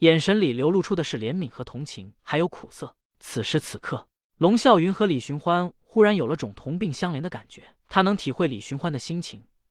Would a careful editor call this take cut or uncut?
cut